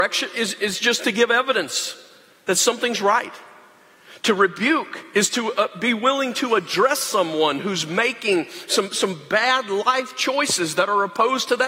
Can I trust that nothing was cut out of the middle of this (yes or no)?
yes